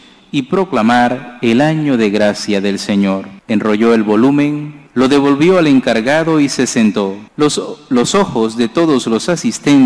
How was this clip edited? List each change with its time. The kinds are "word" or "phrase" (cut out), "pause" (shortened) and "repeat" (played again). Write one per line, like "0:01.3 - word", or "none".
0:03.4 - pause
0:04.9 - pause
0:07.3 - pause